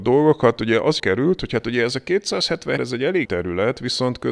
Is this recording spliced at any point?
yes; 3 cuts; at 1.0 s, 2.8 s, 3.2 s

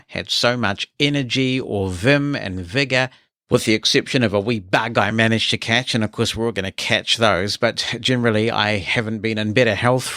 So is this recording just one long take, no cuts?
yes; 0 cuts

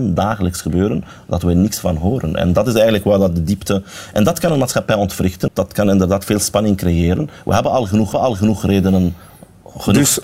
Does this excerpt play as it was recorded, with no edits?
no; 2 cuts; at 5.5 s, 8.1 s

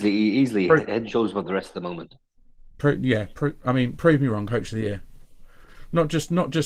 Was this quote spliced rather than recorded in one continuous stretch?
no; 0 cuts

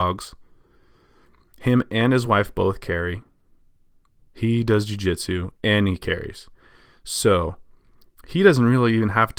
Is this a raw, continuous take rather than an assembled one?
yes; 0 cuts

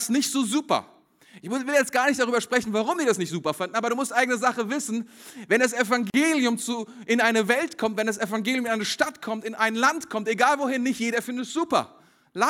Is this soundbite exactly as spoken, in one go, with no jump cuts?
yes; 0 cuts

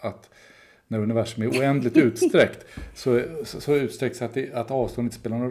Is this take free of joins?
yes; 0 cuts

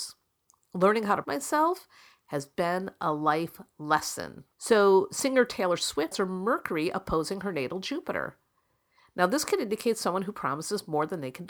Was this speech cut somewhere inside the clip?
yes; 3 cuts; at 1.2 s, 4.5 s, 6.1 s

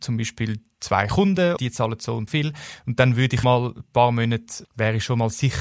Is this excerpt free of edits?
no; 3 cuts; at 1.6 s, 2.3 s, 3.4 s

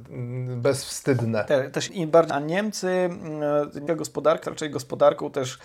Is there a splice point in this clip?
yes; 4 cuts; at 1.9 s, 2.3 s, 3.9 s, 4.4 s

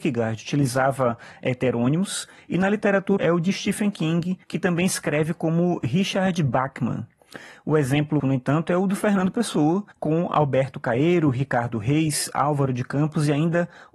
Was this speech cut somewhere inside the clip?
yes; 4 cuts; at 3.2 s, 4.4 s, 8.2 s, 9.9 s

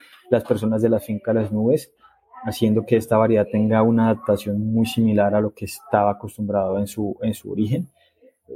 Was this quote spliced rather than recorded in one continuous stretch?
no; 0 cuts

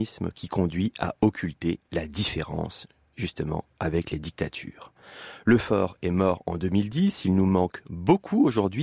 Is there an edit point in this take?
no; 0 cuts

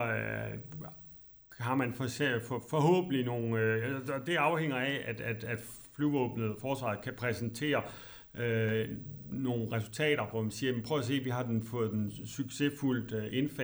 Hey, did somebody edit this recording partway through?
no; 0 cuts

